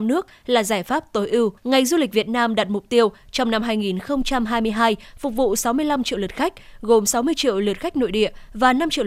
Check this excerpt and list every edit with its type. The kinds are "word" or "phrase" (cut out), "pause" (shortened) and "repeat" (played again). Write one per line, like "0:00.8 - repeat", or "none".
0:01.6 - pause